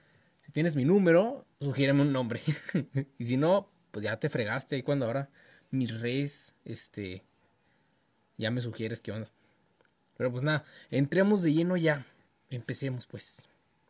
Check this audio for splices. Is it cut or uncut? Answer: cut